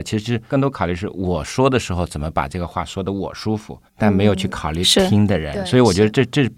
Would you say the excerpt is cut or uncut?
cut